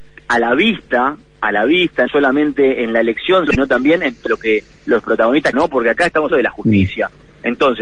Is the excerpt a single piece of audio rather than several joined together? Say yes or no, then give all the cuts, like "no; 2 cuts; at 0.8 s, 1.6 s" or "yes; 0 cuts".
no; 5 cuts; at 2.1 s, 3.5 s, 4.3 s, 5.5 s, 6.3 s